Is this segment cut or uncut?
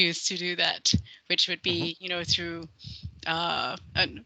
uncut